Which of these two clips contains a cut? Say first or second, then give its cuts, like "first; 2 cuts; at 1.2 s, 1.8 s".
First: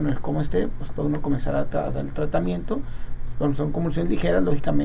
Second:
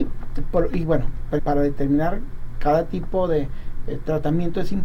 second; 1 cut; at 1.4 s